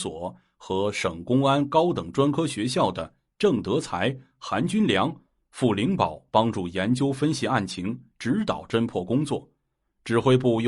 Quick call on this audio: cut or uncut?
uncut